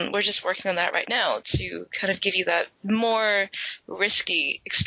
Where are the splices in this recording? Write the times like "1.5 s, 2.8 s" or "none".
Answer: 2.7 s